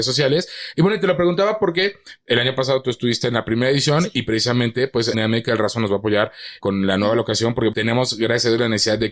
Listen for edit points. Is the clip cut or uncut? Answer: cut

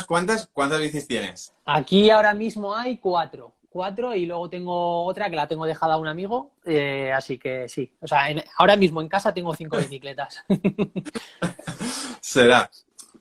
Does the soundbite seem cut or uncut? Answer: cut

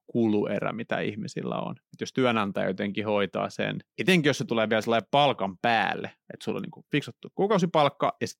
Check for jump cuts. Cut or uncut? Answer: cut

